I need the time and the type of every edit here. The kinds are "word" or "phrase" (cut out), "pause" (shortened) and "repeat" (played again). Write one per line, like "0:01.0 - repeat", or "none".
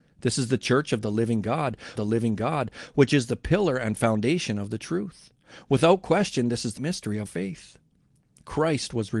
0:02.0 - repeat
0:06.8 - word
0:07.3 - word

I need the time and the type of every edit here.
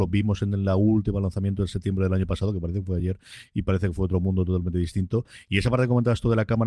none

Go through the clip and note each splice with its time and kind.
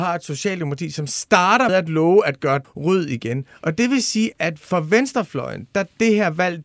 0:01.7 - word
0:02.6 - word
0:04.3 - word

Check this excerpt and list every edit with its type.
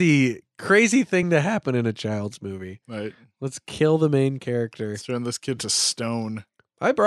none

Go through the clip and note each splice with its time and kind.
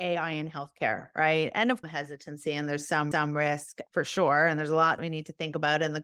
0:01.8 - phrase
0:03.1 - repeat
0:05.0 - phrase

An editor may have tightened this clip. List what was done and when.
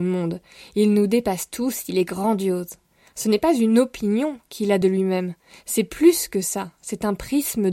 none

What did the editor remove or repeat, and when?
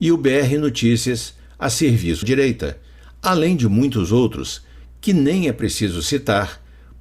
0:02.2 - word

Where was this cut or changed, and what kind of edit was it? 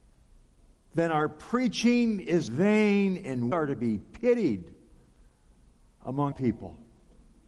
0:02.5 - word
0:03.5 - word
0:06.3 - word

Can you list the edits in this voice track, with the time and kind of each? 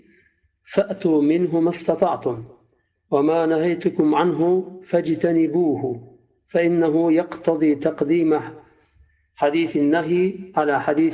none

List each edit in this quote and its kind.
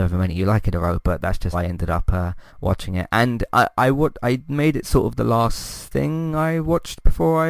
0:01.5 - word
0:02.5 - pause

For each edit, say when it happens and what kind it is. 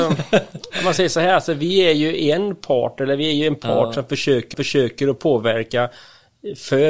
0:04.5 - repeat

